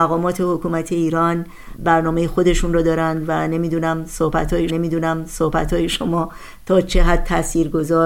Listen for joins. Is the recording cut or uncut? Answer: cut